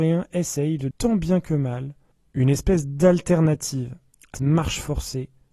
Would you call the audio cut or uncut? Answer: cut